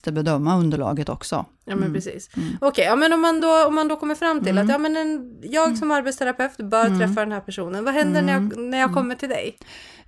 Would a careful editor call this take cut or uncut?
uncut